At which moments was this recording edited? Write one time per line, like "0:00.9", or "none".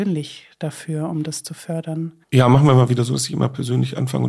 0:02.2